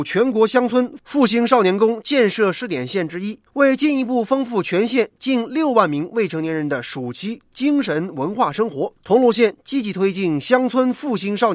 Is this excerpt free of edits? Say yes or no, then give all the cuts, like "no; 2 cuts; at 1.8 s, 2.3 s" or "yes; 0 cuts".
no; 2 cuts; at 3.5 s, 9.0 s